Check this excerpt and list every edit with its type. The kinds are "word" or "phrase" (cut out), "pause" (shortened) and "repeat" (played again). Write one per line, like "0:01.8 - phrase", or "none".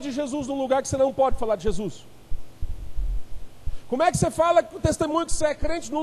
none